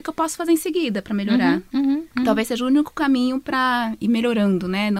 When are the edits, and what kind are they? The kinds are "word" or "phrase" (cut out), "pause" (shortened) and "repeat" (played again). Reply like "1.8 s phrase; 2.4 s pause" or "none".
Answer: none